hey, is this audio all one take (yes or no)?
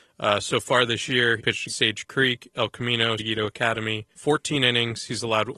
no